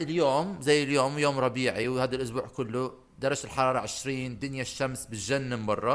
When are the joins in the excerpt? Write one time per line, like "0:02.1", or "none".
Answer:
none